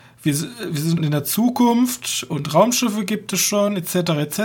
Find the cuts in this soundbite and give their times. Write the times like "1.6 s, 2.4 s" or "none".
1.0 s